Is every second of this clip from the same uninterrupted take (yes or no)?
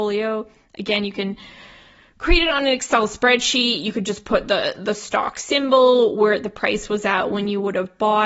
yes